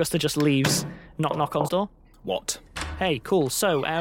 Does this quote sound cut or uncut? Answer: cut